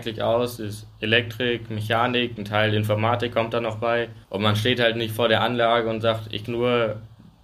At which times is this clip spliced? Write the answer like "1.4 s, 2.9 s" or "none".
4.2 s, 6.5 s

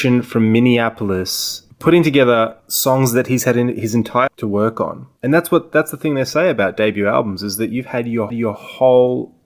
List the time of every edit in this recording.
2.6 s, 4.3 s, 8.3 s

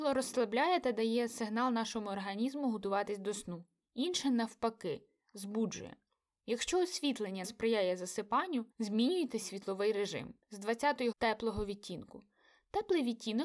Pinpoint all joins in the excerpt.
7.4 s, 8.7 s, 10.4 s, 11.1 s

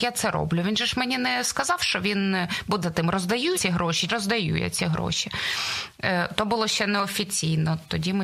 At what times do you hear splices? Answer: 2.8 s, 3.5 s, 4.1 s

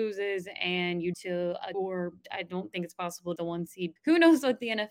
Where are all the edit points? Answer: 1.1 s, 1.7 s, 2.2 s, 3.4 s, 4.0 s

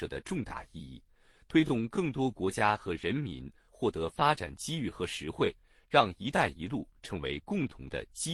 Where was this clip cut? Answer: none

